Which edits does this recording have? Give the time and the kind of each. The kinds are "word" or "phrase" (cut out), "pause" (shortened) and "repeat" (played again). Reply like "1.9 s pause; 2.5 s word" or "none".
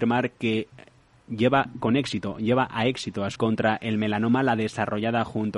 3.4 s word

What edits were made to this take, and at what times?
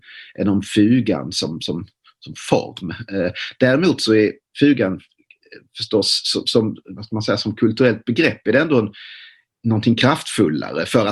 none

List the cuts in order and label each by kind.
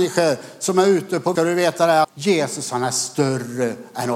1.4 s phrase; 2.0 s word

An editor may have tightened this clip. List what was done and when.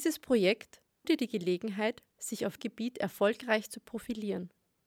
1.0 s word; 2.6 s word

